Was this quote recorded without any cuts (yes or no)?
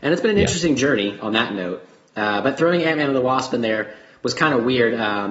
yes